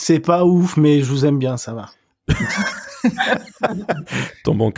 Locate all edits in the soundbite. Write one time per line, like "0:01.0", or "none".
none